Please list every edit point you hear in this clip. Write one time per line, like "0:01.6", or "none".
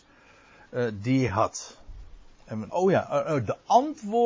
0:01.3
0:02.7